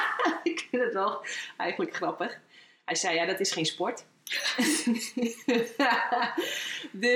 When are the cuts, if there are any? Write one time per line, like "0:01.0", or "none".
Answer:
none